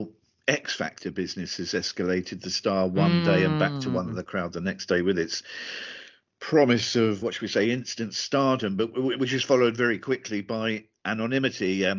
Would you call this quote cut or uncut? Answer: cut